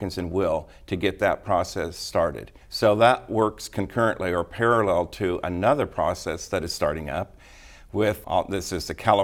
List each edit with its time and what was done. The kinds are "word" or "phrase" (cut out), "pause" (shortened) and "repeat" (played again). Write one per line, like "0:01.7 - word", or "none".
0:02.6 - pause
0:08.2 - word

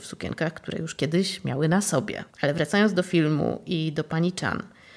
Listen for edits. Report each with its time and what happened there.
0:02.3 - pause

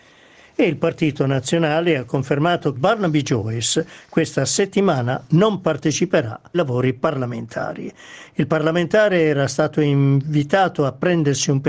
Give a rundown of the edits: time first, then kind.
0:02.8 - word
0:06.5 - word

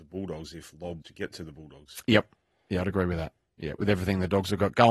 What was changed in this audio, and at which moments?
0:01.0 - word

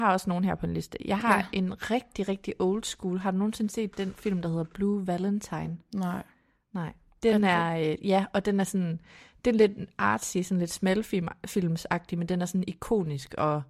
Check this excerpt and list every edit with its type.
none

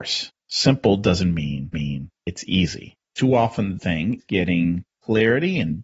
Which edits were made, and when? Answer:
0:01.7 - repeat
0:03.8 - word
0:04.2 - word

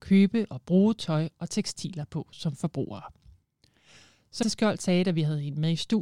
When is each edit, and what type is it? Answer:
0:04.4 - word

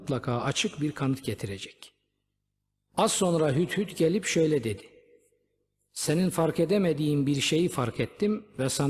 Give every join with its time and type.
none

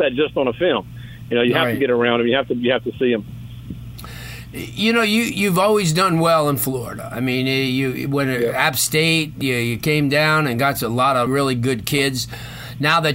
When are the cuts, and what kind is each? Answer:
0:11.3 - word

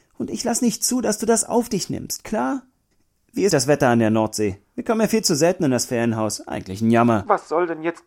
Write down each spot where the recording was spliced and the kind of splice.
0:02.9 - pause
0:03.5 - word

